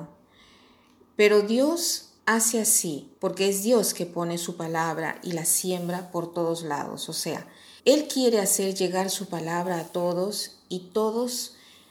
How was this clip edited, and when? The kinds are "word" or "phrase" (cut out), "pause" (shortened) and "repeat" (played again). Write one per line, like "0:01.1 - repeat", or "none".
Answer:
0:02.2 - pause
0:03.2 - pause
0:07.8 - pause